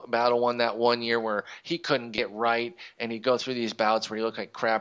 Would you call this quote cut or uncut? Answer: uncut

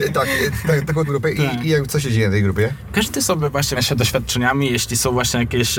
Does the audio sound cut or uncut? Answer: cut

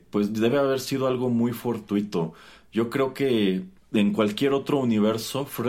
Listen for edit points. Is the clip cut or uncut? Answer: cut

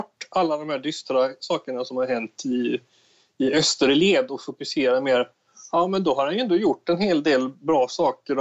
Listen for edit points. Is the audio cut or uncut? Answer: uncut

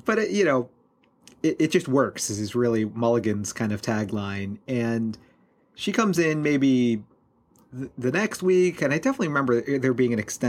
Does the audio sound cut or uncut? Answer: uncut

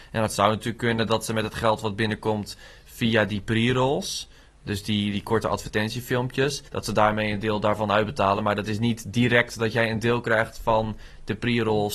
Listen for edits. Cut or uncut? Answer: cut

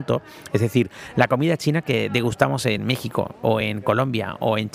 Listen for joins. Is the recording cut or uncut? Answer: uncut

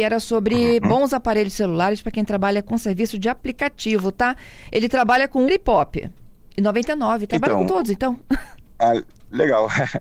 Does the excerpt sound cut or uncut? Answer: cut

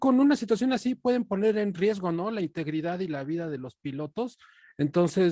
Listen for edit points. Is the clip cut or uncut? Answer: uncut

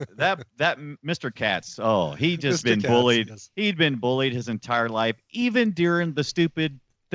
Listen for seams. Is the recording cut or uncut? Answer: uncut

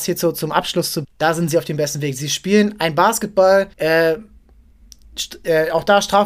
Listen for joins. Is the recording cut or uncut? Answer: cut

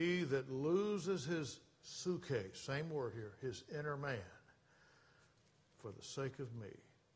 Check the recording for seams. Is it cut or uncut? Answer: uncut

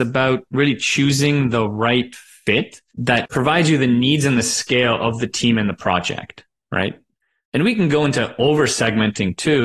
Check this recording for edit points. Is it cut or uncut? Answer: uncut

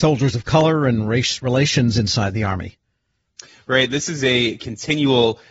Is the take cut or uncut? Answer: uncut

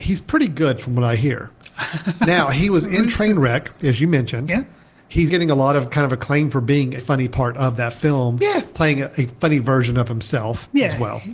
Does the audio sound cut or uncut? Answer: cut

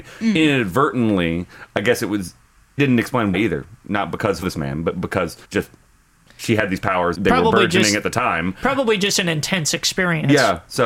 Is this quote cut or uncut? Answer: cut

